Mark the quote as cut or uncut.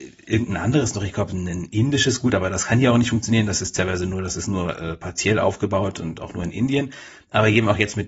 uncut